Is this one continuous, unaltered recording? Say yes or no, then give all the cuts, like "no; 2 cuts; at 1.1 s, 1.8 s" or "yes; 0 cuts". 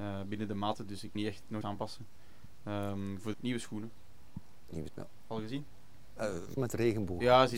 no; 5 cuts; at 1.1 s, 1.6 s, 3.3 s, 4.9 s, 6.6 s